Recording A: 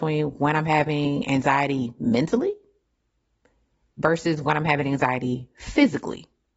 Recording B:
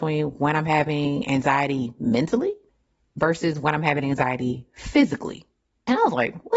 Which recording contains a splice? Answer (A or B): B